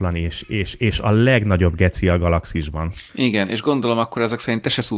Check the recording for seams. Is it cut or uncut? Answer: cut